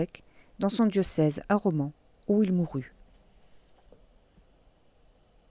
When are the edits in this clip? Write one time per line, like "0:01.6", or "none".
none